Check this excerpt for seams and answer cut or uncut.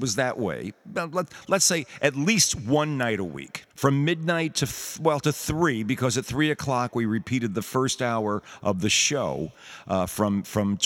cut